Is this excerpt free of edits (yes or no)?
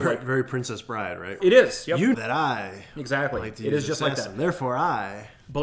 no